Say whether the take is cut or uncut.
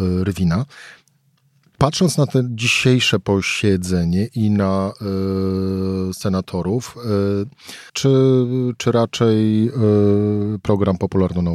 cut